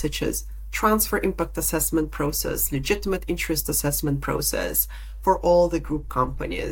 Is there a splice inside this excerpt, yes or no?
no